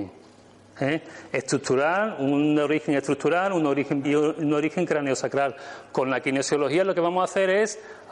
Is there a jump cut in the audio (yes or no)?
yes